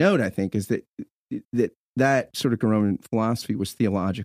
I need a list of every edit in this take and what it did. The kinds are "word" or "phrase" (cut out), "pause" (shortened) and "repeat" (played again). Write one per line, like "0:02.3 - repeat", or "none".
0:01.4 - pause
0:02.6 - word